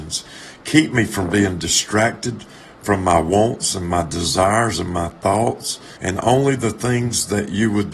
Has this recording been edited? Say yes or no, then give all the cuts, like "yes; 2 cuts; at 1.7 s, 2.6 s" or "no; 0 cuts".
yes; 1 cut; at 6.0 s